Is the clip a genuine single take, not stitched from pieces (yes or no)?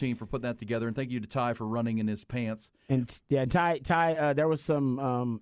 yes